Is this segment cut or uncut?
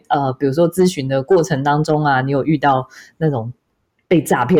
uncut